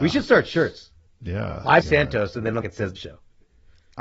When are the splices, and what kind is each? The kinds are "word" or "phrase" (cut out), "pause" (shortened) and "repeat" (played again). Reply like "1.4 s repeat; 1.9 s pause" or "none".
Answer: 1.1 s pause; 1.8 s word; 2.6 s phrase; 3.0 s word